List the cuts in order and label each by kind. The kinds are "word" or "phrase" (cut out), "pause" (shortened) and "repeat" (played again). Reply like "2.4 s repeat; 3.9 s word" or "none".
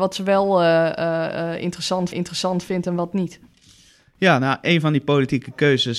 2.1 s repeat

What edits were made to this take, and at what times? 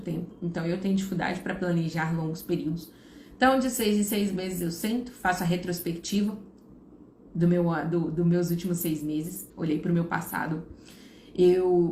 9.5 s pause

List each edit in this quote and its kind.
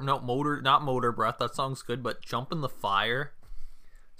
none

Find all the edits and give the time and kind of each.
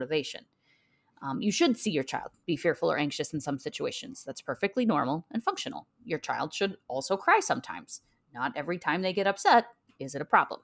none

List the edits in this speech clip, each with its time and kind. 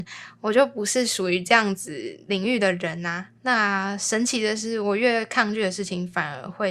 3.4 s pause

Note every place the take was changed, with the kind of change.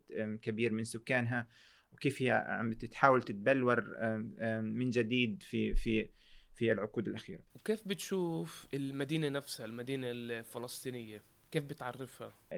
none

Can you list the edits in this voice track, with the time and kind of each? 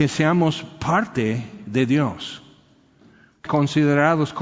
3.5 s word

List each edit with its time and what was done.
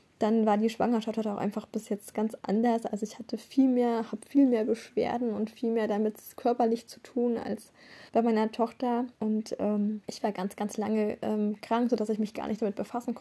2.1 s word; 8.1 s pause; 9.2 s pause; 10.0 s pause

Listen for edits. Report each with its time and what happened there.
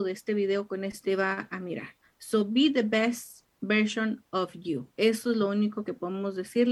1.0 s word; 2.0 s pause; 4.9 s pause

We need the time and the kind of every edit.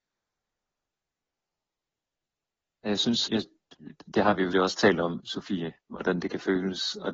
3.3 s word; 4.5 s word; 5.2 s word; 5.8 s pause

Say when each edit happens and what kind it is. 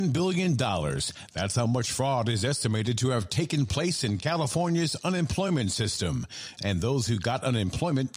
none

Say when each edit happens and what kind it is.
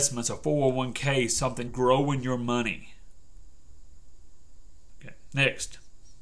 1.7 s word

